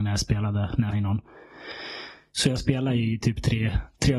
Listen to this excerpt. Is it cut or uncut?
cut